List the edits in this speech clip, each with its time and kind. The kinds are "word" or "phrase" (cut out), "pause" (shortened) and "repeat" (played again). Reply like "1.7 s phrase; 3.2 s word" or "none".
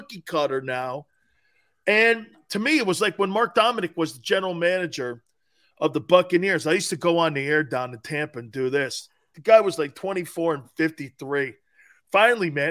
none